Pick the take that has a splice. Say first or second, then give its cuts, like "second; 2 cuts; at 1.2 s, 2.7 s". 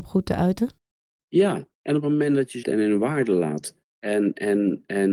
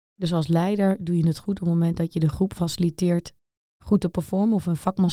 first; 2 cuts; at 2.6 s, 3.8 s